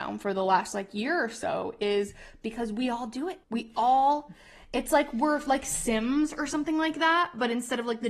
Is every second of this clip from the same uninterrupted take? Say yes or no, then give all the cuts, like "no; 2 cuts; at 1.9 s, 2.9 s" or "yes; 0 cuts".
no; 1 cut; at 3.4 s